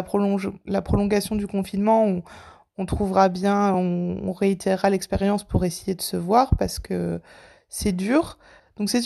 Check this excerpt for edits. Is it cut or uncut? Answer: uncut